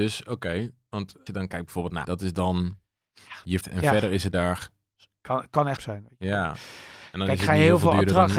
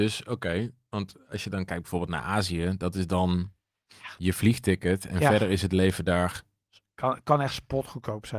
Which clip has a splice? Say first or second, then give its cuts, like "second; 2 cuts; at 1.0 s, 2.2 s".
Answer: first; 5 cuts; at 1.3 s, 2.0 s, 3.6 s, 4.3 s, 5.8 s